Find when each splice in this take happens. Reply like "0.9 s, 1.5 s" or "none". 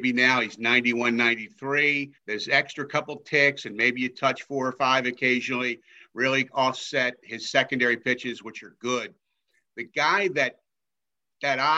2.2 s